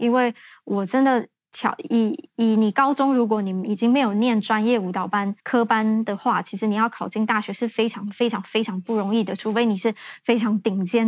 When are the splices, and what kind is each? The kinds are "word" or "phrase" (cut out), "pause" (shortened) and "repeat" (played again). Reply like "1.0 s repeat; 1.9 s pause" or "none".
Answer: 5.4 s pause